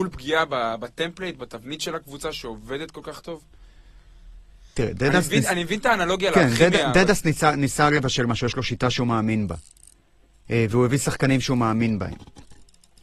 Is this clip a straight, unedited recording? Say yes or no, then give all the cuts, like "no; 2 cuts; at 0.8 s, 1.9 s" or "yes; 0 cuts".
yes; 0 cuts